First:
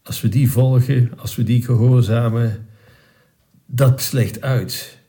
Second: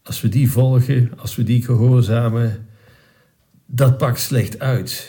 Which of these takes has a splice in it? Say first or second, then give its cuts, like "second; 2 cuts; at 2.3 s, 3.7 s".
first; 1 cut; at 4.0 s